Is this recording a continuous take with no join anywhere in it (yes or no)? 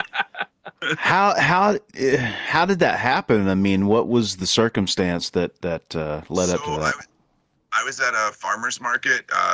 yes